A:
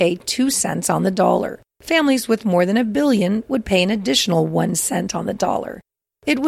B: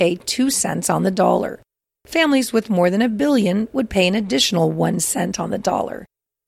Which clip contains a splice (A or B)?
A